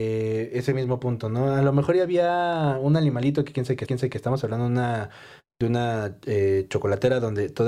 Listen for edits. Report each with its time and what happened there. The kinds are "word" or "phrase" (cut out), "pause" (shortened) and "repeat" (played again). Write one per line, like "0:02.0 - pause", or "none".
0:03.9 - repeat